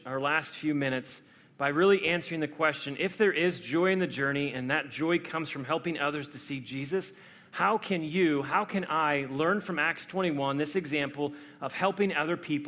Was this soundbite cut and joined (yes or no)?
no